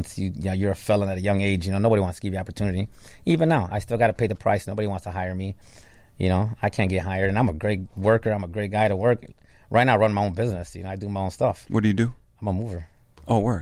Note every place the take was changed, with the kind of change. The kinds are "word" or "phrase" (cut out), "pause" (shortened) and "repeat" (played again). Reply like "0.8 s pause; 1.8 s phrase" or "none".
none